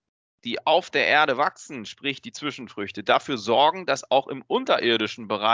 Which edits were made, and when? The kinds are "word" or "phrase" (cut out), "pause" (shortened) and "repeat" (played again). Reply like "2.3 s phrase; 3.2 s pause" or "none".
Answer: none